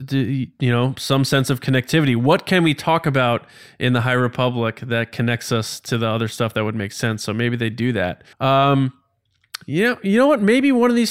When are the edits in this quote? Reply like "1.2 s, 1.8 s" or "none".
8.3 s